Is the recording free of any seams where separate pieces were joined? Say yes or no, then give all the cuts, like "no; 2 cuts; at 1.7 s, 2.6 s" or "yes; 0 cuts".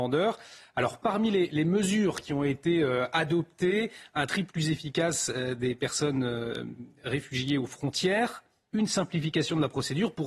yes; 0 cuts